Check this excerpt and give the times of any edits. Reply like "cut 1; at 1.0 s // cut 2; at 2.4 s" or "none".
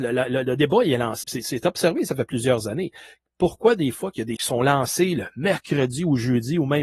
cut 1; at 1.2 s // cut 2; at 4.4 s